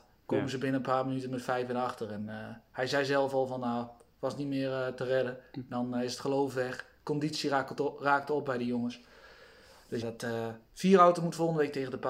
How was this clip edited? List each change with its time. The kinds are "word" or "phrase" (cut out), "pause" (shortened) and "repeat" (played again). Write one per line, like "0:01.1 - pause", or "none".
0:10.0 - word